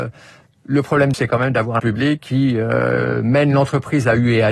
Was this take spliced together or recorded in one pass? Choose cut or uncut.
cut